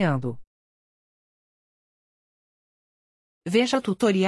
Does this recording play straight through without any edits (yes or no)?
yes